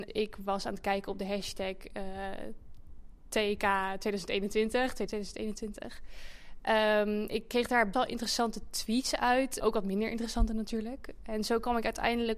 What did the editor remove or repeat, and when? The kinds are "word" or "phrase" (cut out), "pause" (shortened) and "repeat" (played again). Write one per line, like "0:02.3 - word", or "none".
0:05.1 - word
0:07.3 - word
0:07.9 - word
0:09.6 - word